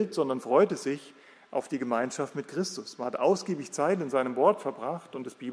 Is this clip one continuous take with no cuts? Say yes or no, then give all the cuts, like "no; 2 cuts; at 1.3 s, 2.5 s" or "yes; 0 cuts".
yes; 0 cuts